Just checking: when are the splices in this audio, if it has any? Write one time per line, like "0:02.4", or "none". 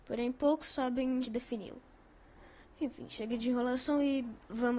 0:01.2